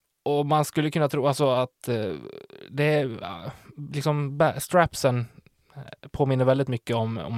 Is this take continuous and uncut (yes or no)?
yes